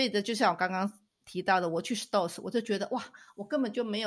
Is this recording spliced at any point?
no; 0 cuts

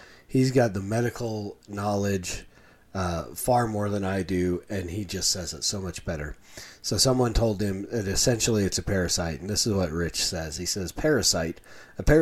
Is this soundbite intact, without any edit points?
yes; 0 cuts

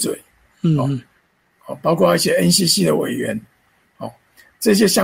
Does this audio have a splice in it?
no; 0 cuts

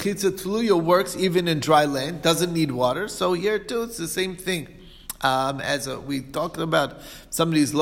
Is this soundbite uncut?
yes; 0 cuts

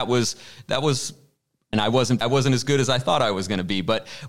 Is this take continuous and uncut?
no; 2 cuts; at 1.7 s, 2.2 s

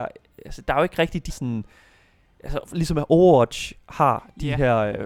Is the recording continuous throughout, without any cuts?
no; 1 cut; at 1.3 s

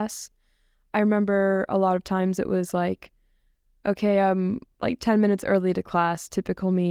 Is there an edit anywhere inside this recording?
no; 0 cuts

